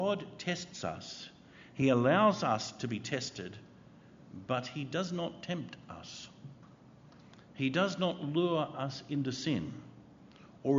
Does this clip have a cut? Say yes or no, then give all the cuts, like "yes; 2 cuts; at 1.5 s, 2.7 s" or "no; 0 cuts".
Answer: no; 0 cuts